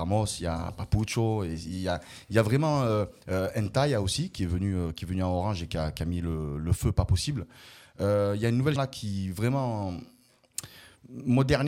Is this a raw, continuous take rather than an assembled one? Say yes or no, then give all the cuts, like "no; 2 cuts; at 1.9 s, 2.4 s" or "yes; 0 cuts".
no; 1 cut; at 8.8 s